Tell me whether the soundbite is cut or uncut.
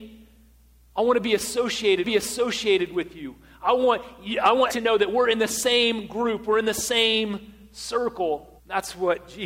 cut